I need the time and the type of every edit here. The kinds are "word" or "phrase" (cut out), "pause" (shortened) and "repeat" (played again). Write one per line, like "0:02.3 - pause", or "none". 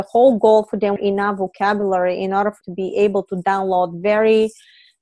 0:01.0 - phrase
0:02.6 - word